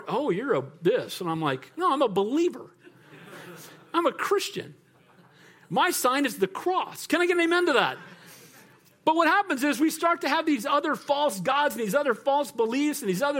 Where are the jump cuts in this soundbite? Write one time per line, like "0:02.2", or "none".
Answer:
none